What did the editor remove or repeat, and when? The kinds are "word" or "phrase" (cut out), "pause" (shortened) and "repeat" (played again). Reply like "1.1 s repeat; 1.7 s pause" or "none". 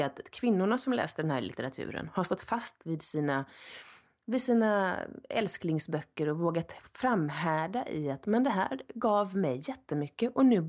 none